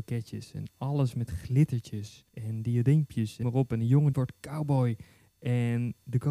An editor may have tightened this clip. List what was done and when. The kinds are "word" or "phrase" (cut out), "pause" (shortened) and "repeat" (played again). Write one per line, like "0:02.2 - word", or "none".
0:02.3 - pause
0:03.4 - word
0:04.1 - phrase